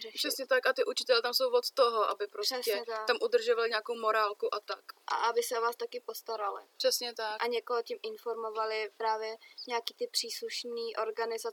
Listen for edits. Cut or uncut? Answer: uncut